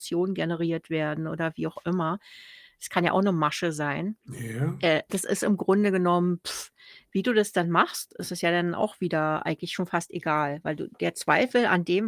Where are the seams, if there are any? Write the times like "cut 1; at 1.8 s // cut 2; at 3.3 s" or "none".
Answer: cut 1; at 4.2 s // cut 2; at 5.1 s